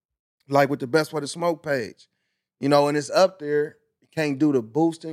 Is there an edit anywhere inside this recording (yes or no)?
no